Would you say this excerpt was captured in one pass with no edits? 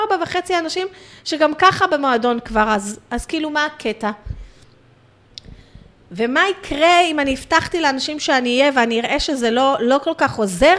yes; 0 cuts

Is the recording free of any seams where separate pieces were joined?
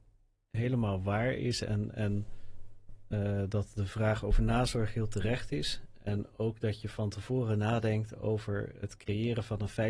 yes; 0 cuts

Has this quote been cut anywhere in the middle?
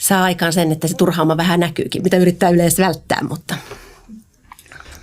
yes; 1 cut; at 2.0 s

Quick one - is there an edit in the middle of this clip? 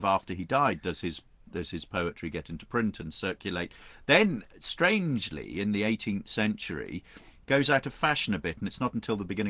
no; 0 cuts

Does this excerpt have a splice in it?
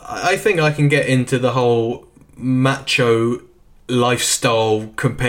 no; 0 cuts

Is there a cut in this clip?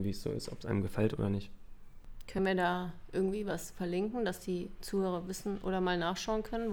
no; 0 cuts

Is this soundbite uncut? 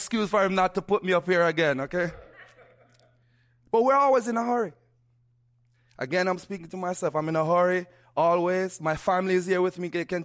yes; 0 cuts

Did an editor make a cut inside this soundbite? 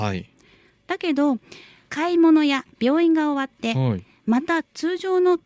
no; 0 cuts

